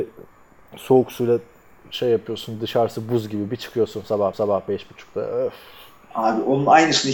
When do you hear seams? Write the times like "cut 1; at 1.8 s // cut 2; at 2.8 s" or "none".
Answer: cut 1; at 4.3 s